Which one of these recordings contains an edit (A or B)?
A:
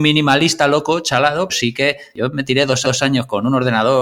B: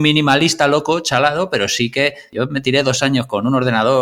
A